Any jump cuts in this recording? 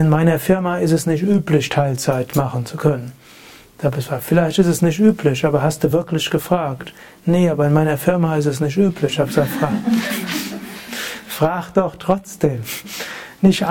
no; 0 cuts

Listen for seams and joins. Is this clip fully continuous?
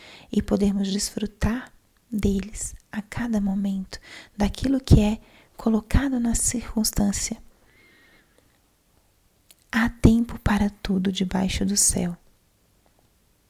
yes; 0 cuts

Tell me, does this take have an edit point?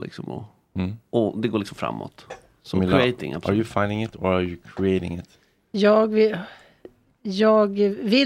no; 0 cuts

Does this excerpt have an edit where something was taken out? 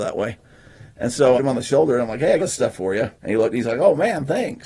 yes; 3 cuts; at 1.4 s, 2.4 s, 3.2 s

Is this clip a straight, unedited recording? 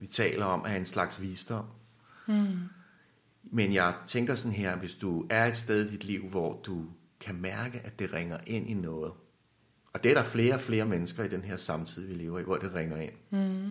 yes; 0 cuts

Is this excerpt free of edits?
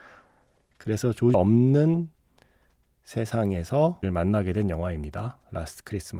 no; 2 cuts; at 1.3 s, 4.0 s

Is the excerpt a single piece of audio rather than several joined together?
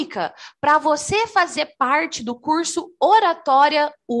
yes; 0 cuts

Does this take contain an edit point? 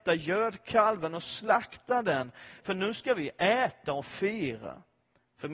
no; 0 cuts

